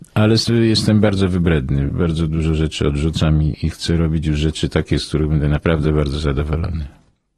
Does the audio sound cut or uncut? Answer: uncut